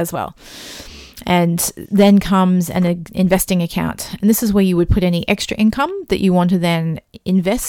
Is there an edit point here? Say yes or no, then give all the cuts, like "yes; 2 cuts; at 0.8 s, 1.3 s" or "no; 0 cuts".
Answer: no; 0 cuts